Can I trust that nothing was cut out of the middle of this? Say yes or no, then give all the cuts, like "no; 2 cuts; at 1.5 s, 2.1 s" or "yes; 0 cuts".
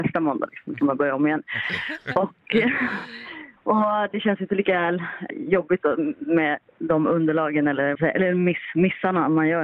no; 2 cuts; at 5.3 s, 7.9 s